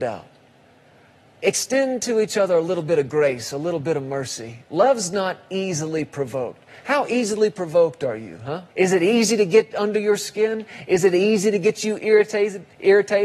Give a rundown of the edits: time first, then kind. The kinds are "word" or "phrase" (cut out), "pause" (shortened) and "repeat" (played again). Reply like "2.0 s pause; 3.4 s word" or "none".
4.6 s pause; 8.7 s pause